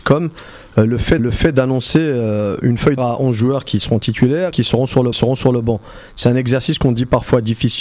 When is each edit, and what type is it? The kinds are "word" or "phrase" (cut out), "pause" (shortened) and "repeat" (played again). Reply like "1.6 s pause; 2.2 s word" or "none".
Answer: 1.2 s repeat; 3.0 s phrase; 4.5 s phrase; 5.1 s repeat